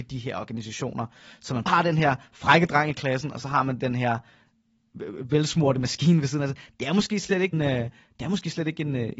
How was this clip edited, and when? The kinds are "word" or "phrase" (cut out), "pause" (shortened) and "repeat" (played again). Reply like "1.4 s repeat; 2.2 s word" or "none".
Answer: 1.7 s word; 7.5 s word